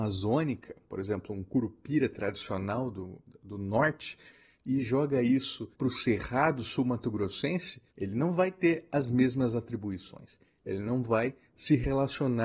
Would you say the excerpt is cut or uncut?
cut